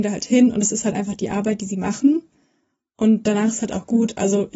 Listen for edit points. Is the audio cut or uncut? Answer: uncut